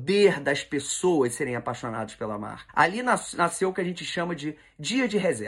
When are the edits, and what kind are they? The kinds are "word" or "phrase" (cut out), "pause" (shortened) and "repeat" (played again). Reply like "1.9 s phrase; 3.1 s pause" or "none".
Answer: none